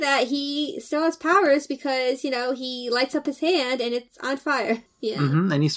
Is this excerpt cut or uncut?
uncut